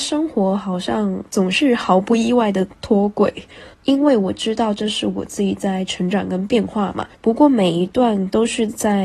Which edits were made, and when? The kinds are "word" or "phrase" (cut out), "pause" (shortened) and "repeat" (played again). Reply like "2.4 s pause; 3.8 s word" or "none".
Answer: 1.3 s pause; 3.7 s pause; 7.1 s pause